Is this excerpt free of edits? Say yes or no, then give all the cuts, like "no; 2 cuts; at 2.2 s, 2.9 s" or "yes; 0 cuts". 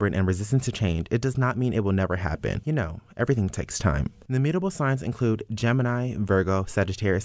yes; 0 cuts